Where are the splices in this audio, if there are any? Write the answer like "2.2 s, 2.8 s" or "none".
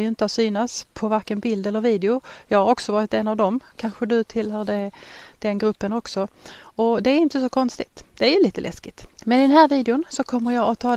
9.1 s